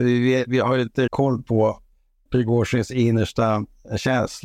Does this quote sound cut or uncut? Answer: cut